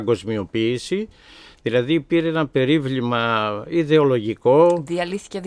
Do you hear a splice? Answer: no; 0 cuts

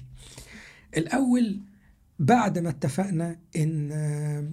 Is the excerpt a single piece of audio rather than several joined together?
yes; 0 cuts

